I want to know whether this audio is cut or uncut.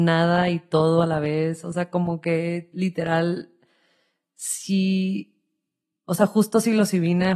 uncut